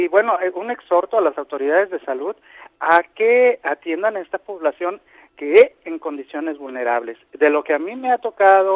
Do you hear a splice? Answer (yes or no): yes